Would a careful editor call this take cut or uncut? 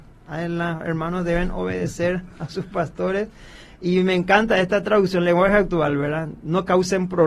uncut